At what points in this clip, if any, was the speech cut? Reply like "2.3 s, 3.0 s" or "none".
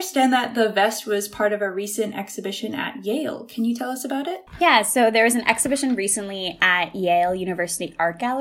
4.5 s